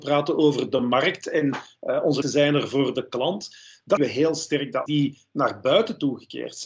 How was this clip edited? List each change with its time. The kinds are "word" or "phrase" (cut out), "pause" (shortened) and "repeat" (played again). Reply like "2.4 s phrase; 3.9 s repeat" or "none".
2.2 s word; 4.0 s word; 4.9 s word